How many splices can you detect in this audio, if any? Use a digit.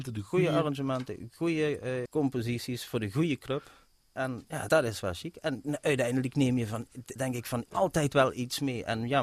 4